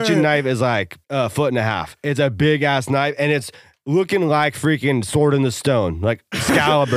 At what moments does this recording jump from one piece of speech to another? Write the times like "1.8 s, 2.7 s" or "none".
1.0 s